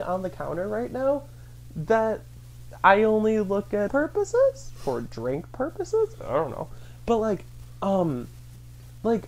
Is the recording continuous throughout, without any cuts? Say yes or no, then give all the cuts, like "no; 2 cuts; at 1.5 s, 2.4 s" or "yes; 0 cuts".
no; 1 cut; at 3.9 s